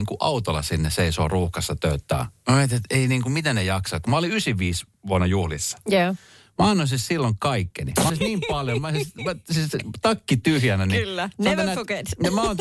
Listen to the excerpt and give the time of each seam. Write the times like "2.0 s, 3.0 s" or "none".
8.1 s